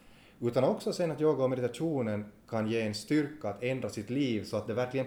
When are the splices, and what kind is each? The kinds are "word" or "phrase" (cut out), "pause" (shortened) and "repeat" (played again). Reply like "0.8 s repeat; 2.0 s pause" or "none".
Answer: 2.4 s pause